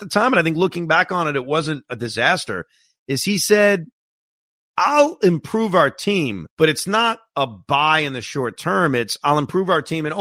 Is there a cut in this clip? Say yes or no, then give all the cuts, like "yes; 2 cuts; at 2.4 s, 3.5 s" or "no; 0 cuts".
yes; 1 cut; at 6.5 s